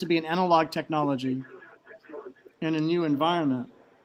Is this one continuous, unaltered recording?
yes; 0 cuts

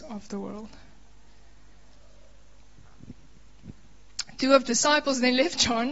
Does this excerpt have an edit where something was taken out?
yes; 1 cut; at 4.6 s

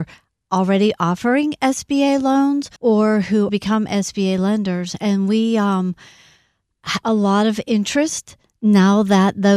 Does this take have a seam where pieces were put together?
yes; 3 cuts; at 2.8 s, 3.5 s, 7.0 s

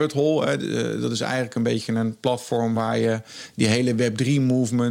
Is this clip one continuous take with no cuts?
yes; 0 cuts

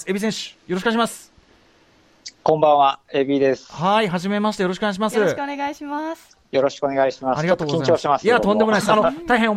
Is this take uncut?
no; 2 cuts; at 2.4 s, 6.4 s

